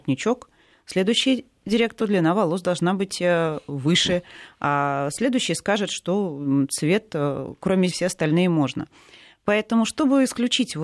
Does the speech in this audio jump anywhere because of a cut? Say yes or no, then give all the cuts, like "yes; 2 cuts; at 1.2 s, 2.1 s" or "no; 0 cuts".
yes; 2 cuts; at 2.0 s, 7.9 s